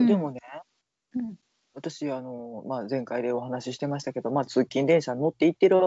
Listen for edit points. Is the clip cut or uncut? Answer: uncut